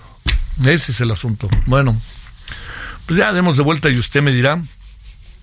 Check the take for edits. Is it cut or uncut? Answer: uncut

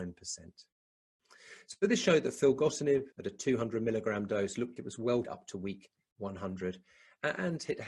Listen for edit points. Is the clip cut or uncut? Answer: cut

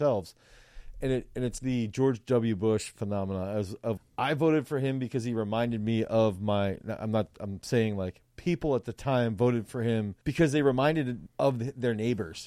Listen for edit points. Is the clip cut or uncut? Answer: cut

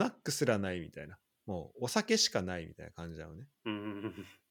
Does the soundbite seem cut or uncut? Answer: cut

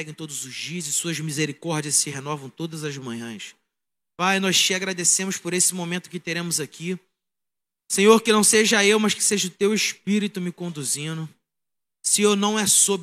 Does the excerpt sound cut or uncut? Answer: uncut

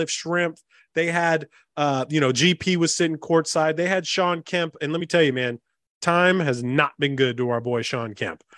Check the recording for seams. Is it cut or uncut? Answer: uncut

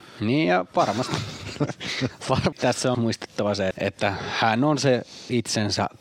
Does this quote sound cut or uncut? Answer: cut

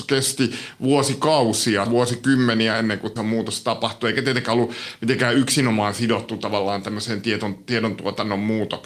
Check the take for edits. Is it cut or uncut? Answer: cut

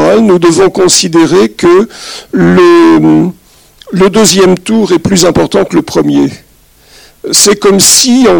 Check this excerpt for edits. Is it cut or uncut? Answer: uncut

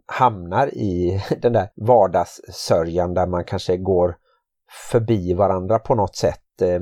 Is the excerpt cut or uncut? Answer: cut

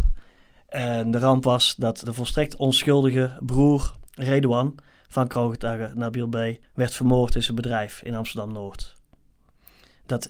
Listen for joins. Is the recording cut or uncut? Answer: cut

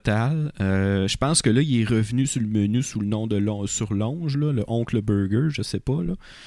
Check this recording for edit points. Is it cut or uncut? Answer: uncut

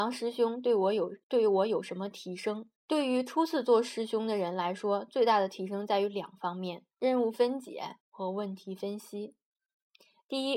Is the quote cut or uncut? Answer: cut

